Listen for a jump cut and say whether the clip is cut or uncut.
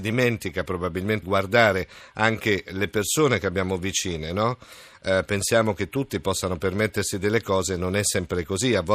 cut